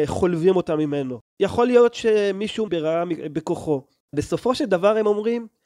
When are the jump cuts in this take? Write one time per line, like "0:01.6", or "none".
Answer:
0:02.7
0:04.1

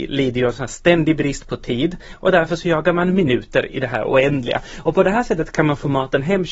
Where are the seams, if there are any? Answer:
none

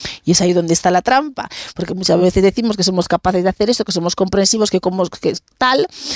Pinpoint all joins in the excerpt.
none

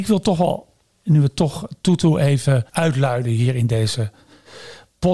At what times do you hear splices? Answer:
0:02.7

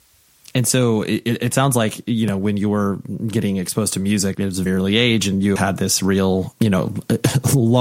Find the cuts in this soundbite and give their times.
0:04.3
0:04.7
0:05.6
0:06.5

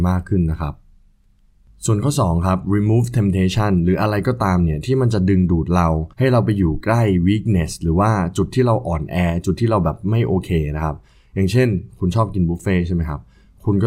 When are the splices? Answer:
0:06.1

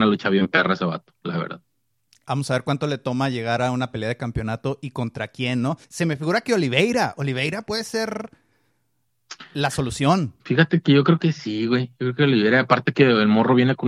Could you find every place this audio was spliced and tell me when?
0:05.8
0:10.4

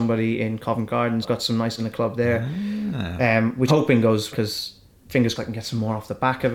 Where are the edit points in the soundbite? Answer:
0:01.2
0:01.8
0:03.7
0:04.3
0:05.4

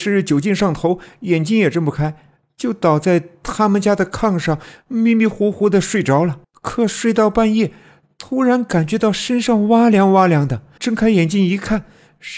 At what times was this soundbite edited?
0:06.4
0:10.8

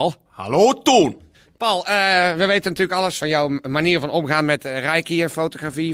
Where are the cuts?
none

